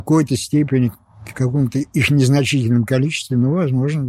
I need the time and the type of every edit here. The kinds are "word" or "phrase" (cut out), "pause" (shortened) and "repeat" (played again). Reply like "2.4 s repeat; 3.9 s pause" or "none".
1.3 s word